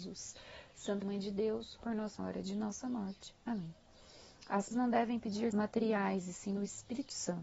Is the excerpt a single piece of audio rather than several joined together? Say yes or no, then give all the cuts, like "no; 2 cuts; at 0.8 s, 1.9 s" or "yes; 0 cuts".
no; 5 cuts; at 1.0 s, 1.8 s, 2.2 s, 4.7 s, 5.5 s